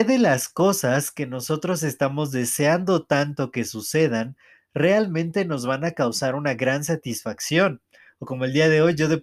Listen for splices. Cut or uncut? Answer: uncut